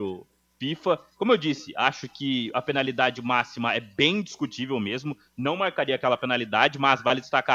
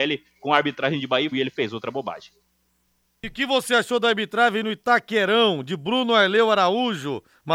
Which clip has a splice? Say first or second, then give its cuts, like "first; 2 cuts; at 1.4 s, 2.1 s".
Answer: second; 1 cut; at 1.3 s